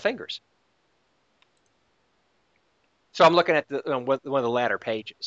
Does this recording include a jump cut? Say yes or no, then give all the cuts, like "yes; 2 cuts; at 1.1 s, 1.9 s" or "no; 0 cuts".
no; 0 cuts